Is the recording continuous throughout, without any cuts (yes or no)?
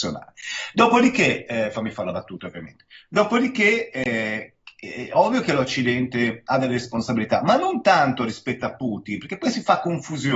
yes